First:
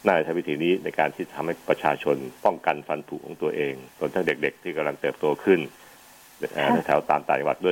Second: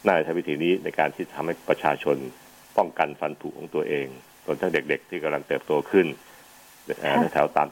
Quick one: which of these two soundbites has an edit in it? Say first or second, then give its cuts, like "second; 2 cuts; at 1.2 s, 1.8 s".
first; 2 cuts; at 2.4 s, 3.9 s